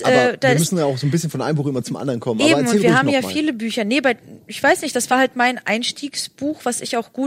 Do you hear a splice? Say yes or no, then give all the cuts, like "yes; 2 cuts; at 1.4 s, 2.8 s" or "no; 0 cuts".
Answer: no; 0 cuts